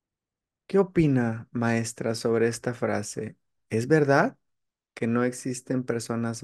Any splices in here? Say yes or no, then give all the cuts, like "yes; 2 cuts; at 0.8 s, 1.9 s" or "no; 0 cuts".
no; 0 cuts